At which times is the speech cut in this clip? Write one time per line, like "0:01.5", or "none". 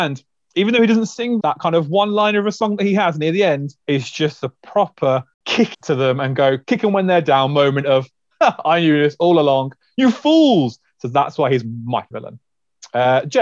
0:01.4
0:03.8
0:05.7
0:12.1